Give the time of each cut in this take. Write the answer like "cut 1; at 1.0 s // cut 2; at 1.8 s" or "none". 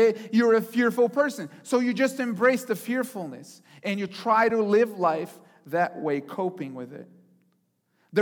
none